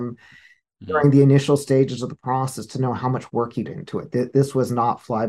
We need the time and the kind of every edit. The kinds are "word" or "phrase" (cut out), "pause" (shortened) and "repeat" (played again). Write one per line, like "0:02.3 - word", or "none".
0:03.7 - word